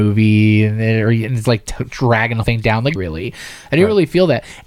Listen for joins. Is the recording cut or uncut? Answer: cut